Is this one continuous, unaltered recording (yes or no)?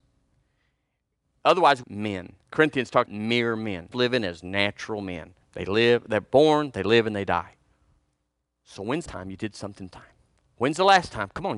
no